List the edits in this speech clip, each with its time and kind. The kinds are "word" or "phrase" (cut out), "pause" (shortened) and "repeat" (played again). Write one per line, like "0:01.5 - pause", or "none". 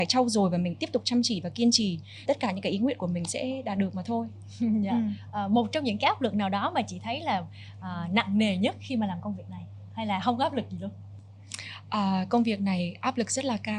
0:02.3 - word